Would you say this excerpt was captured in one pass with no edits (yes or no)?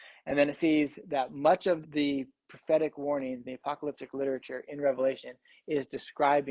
no